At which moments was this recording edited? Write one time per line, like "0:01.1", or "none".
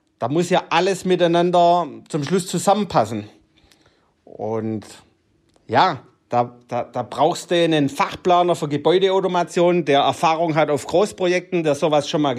none